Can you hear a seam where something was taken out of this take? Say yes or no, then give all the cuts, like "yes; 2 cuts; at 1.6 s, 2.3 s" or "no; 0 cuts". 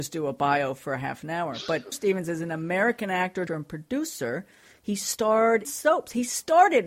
yes; 3 cuts; at 1.9 s, 3.5 s, 5.6 s